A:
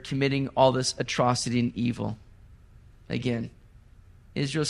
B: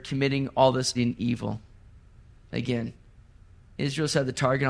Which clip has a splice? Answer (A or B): B